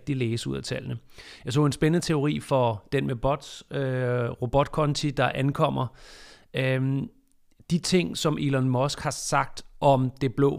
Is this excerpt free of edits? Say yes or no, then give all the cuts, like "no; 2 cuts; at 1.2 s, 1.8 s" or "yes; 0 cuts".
yes; 0 cuts